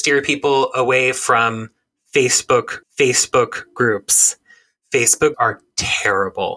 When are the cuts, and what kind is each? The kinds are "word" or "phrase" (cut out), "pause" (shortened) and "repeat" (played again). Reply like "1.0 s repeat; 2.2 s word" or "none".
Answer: 2.8 s repeat; 5.3 s word